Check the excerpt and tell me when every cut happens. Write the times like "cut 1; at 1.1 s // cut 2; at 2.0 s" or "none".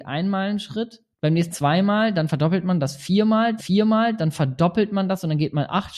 cut 1; at 1.1 s // cut 2; at 1.5 s // cut 3; at 3.6 s